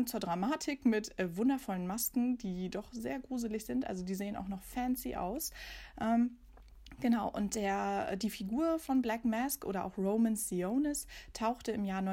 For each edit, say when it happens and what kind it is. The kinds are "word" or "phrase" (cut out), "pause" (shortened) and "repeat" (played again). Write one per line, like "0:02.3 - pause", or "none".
none